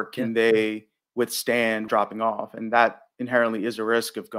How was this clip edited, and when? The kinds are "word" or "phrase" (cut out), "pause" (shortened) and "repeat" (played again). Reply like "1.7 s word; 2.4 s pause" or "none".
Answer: 1.9 s phrase